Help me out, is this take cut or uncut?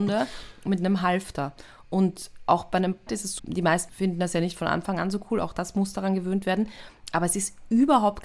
cut